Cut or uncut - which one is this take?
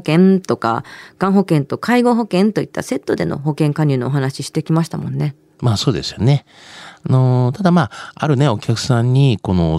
uncut